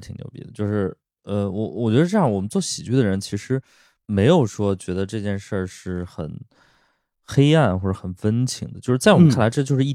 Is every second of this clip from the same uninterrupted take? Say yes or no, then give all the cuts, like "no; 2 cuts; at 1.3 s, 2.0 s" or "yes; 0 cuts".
yes; 0 cuts